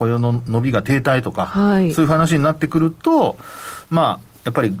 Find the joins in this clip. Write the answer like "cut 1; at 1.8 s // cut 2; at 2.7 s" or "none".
none